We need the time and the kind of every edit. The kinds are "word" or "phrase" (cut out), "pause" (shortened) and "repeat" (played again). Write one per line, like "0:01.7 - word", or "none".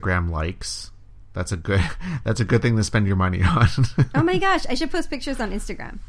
none

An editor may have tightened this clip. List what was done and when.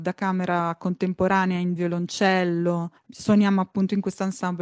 0:01.8 - phrase
0:03.0 - pause

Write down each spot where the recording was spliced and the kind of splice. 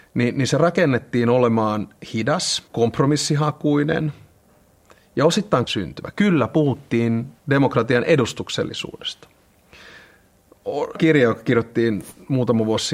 0:02.7 - pause
0:05.7 - word
0:07.4 - pause
0:11.0 - word

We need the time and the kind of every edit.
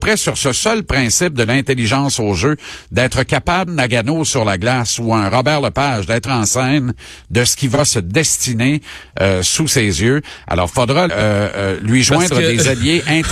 0:03.7 - phrase
0:06.3 - phrase
0:11.1 - phrase

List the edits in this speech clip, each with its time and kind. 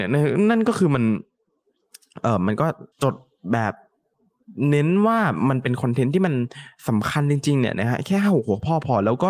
0:02.9 - pause

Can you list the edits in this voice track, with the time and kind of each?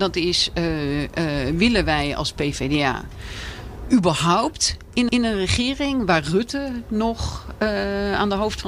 0:05.1 - repeat

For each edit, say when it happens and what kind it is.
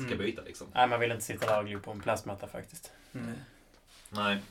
none

